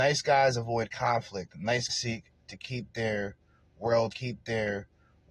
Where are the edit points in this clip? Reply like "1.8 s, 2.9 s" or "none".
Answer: 1.9 s, 4.1 s